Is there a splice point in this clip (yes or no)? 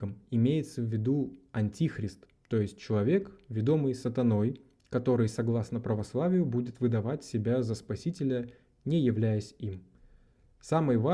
no